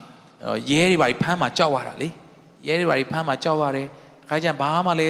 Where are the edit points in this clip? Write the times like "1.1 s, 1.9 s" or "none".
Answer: none